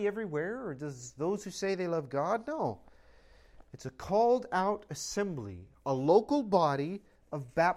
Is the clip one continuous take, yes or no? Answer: yes